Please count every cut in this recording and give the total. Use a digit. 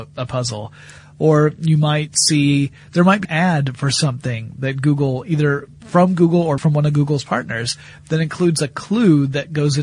2